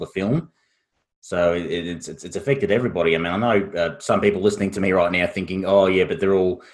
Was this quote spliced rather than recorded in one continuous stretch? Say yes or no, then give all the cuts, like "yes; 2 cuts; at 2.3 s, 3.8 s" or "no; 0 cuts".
no; 0 cuts